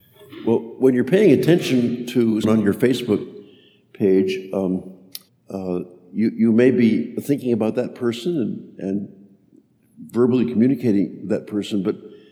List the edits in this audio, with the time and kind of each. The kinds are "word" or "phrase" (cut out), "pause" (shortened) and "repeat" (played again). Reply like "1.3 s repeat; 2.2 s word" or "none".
2.4 s word; 5.3 s pause